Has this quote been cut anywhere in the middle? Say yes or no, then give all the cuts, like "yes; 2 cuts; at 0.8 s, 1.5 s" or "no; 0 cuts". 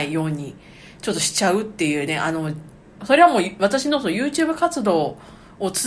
no; 0 cuts